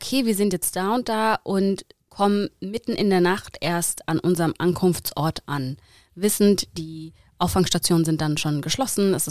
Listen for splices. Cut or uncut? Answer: uncut